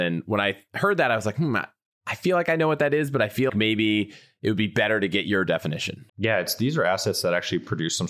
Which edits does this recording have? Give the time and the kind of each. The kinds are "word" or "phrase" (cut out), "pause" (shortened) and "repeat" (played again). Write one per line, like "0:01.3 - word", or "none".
0:03.5 - word
0:06.1 - pause